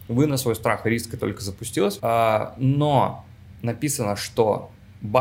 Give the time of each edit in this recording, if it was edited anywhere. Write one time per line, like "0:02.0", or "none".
0:01.2
0:02.0